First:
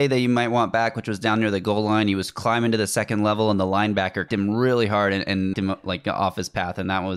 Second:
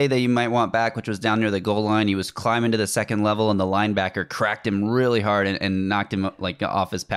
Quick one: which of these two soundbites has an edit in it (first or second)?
first